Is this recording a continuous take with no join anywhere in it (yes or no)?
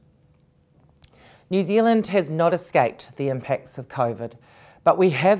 yes